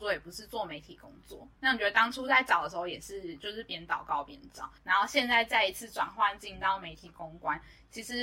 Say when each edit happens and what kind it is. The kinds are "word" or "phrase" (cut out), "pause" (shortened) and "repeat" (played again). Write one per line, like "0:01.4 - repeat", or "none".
0:04.8 - pause